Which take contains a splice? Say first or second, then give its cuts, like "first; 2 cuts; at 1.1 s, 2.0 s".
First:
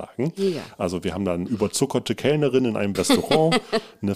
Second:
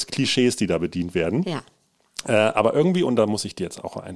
first; 2 cuts; at 1.5 s, 2.9 s